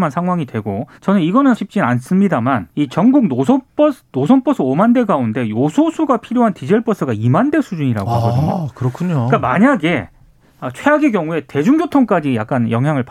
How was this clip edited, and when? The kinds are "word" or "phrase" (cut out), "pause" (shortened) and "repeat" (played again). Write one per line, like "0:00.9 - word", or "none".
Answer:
0:00.9 - pause
0:01.5 - word
0:02.7 - pause